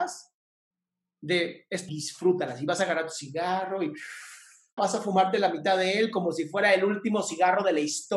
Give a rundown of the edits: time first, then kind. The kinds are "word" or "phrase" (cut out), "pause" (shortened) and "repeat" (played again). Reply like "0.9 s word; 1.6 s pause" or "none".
1.9 s phrase; 4.8 s word